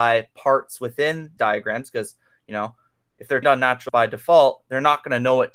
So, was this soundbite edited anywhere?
yes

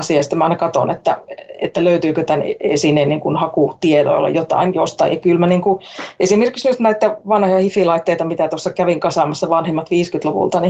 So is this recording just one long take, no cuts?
yes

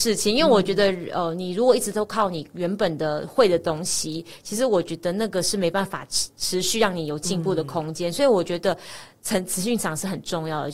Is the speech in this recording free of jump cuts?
yes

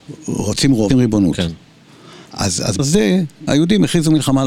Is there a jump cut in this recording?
yes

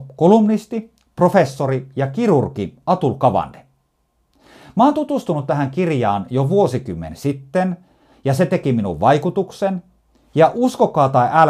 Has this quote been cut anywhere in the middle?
no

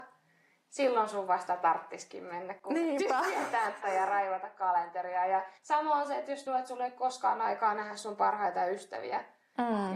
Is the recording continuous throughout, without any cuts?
no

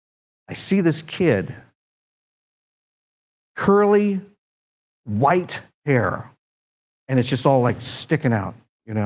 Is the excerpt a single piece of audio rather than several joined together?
yes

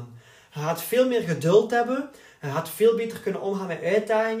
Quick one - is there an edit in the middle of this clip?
no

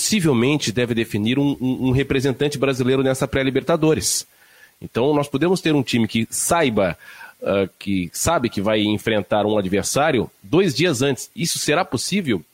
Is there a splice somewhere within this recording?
no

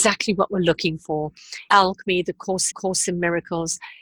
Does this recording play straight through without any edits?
no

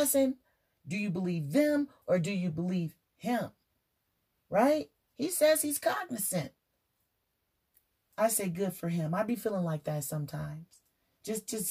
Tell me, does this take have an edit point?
no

